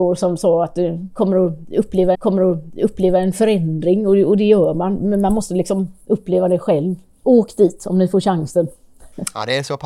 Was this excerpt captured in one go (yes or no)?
no